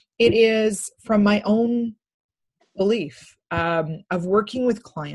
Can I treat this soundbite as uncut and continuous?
yes; 0 cuts

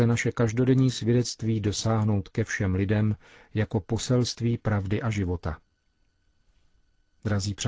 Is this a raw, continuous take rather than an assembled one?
yes; 0 cuts

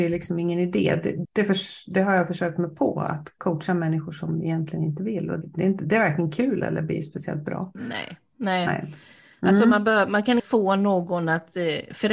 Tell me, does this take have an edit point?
yes; 3 cuts; at 1.2 s, 5.4 s, 10.4 s

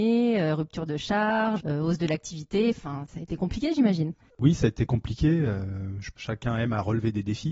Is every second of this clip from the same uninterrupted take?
no; 1 cut; at 1.6 s

